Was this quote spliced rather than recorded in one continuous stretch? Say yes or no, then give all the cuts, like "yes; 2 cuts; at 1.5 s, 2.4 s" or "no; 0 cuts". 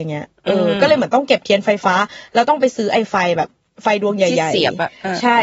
no; 0 cuts